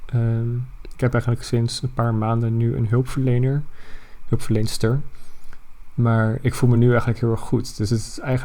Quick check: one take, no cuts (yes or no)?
yes